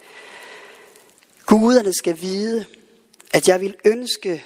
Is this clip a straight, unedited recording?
yes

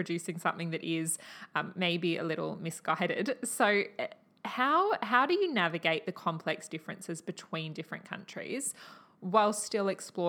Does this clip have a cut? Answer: no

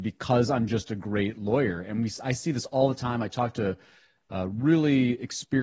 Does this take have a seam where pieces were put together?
no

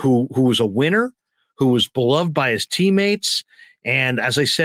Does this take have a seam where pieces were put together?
no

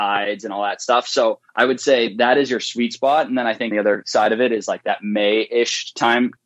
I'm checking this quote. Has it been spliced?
yes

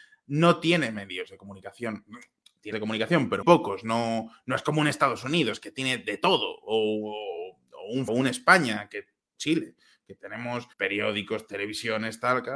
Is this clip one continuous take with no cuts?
no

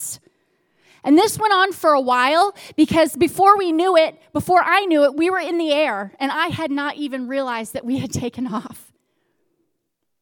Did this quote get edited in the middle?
no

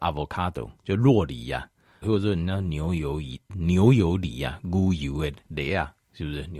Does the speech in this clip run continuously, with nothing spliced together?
no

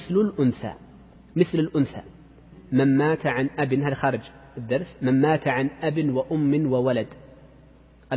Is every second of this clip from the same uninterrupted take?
no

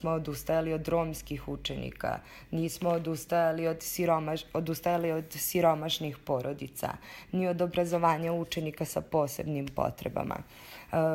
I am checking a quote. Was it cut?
no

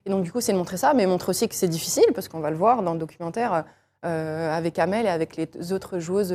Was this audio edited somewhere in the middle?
no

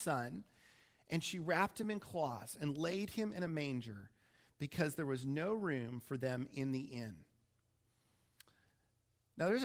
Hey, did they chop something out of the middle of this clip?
no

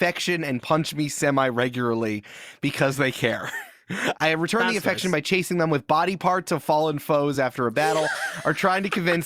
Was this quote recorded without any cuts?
yes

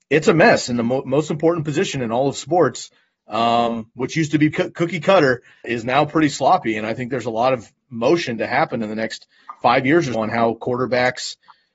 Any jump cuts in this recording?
yes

